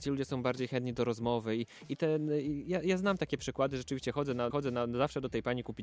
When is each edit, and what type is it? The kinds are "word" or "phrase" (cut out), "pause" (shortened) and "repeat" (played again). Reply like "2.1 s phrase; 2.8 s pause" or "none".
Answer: 4.5 s repeat